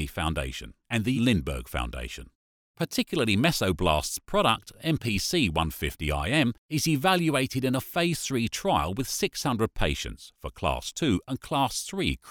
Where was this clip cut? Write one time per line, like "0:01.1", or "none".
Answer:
0:01.1